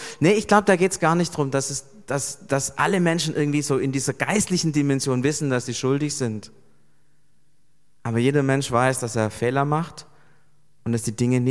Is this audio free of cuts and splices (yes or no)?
yes